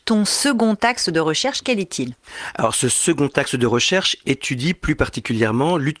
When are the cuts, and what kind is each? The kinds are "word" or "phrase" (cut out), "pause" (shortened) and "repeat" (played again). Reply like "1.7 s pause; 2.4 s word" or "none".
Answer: none